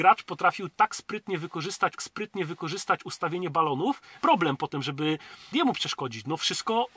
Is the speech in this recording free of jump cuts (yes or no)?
no